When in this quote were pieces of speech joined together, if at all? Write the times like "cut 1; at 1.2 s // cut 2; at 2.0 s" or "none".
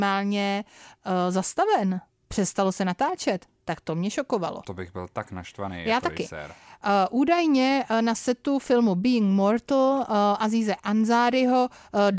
none